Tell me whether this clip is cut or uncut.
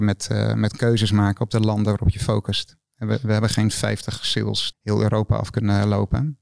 cut